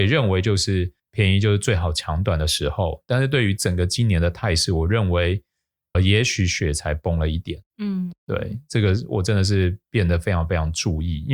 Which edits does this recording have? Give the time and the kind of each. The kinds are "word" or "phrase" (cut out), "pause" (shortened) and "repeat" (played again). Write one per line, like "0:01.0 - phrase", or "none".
0:01.0 - pause
0:05.9 - word
0:07.7 - pause
0:09.8 - pause